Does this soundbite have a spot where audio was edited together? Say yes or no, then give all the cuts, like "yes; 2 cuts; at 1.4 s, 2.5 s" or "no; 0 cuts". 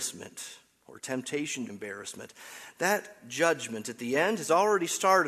yes; 1 cut; at 1.7 s